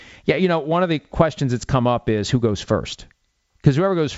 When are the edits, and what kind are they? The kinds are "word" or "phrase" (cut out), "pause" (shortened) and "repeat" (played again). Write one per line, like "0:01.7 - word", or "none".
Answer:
none